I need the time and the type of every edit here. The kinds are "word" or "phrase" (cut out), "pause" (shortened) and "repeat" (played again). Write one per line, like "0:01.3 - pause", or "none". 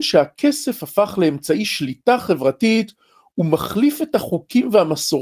none